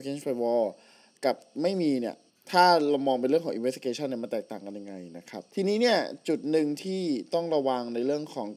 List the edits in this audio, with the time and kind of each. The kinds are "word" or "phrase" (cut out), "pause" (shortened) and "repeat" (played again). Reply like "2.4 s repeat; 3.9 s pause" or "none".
2.3 s pause; 5.5 s pause